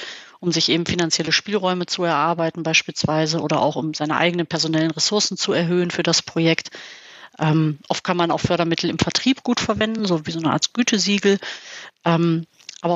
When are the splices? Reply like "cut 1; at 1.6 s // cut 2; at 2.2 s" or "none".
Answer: none